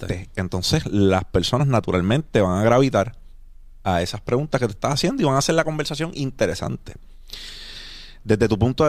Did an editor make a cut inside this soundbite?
no; 0 cuts

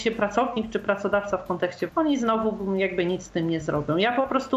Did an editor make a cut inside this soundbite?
yes; 1 cut; at 1.9 s

